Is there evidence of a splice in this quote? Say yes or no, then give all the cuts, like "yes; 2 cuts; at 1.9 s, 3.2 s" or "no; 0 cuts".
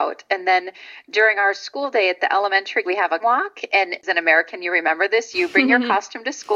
yes; 2 cuts; at 2.8 s, 3.2 s